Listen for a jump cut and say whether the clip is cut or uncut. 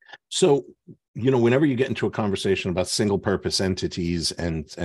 uncut